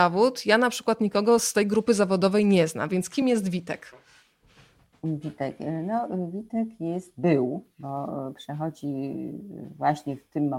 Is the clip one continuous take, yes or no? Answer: yes